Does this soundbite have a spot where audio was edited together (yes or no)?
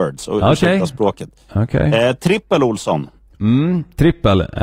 no